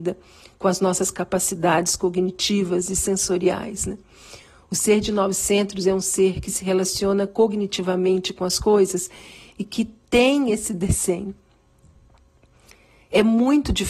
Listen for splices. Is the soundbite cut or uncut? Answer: uncut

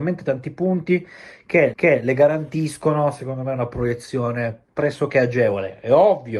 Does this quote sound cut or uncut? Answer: cut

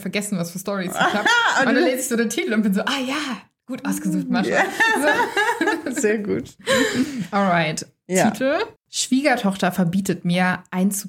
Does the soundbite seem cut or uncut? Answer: cut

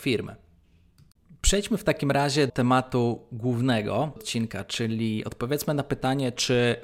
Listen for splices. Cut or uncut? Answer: cut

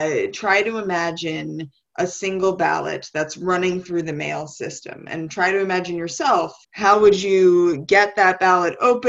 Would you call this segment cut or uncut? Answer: cut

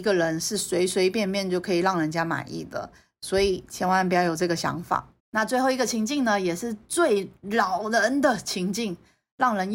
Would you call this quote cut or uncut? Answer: cut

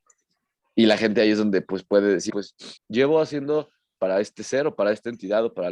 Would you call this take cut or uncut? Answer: cut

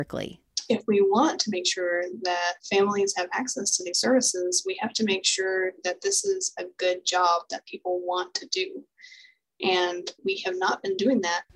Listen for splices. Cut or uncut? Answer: cut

